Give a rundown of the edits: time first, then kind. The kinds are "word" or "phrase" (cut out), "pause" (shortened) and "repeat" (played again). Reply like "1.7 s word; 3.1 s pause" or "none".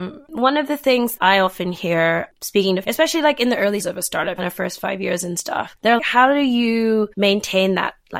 1.2 s word; 2.8 s phrase; 3.8 s word; 4.4 s phrase; 6.0 s word; 7.1 s pause